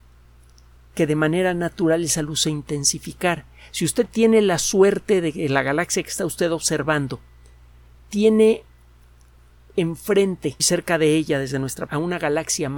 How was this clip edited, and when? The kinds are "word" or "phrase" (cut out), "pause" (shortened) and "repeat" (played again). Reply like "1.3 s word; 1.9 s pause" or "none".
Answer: 10.6 s word; 11.9 s word